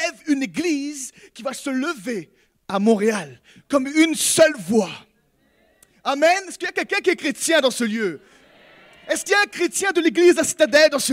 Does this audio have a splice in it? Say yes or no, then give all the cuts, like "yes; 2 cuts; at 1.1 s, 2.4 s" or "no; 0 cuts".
no; 0 cuts